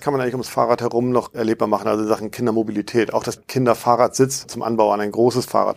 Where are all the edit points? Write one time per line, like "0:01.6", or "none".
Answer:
0:01.3
0:03.4
0:04.4